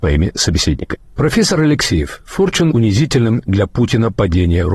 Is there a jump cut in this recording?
yes; 2 cuts; at 1.1 s, 2.7 s

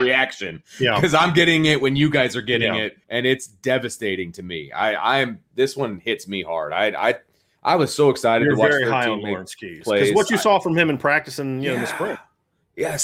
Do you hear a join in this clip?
yes; 1 cut; at 3.0 s

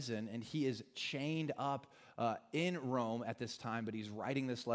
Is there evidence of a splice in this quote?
no; 0 cuts

